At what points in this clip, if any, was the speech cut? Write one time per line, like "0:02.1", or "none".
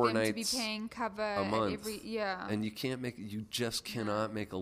none